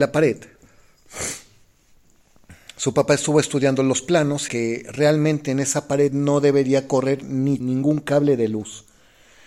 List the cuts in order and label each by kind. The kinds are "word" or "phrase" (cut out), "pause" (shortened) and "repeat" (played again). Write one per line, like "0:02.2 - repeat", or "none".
0:04.5 - phrase
0:07.6 - phrase